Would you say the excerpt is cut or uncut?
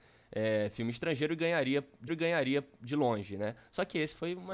cut